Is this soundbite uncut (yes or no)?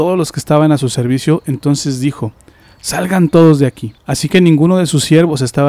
no